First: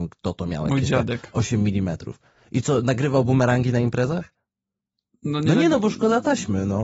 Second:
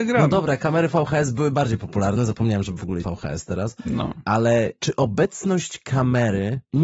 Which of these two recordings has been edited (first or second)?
second